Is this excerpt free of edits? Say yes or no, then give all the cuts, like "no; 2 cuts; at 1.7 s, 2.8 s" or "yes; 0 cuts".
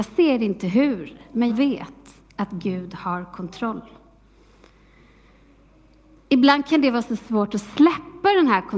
no; 1 cut; at 1.5 s